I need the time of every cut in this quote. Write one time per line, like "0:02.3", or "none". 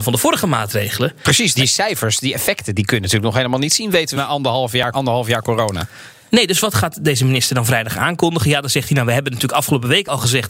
0:01.5
0:04.1
0:04.9